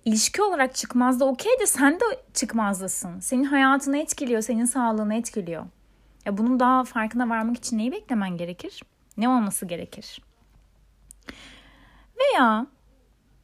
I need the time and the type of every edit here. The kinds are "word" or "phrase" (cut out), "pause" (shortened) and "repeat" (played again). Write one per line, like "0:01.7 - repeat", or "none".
none